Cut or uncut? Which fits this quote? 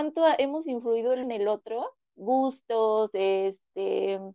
cut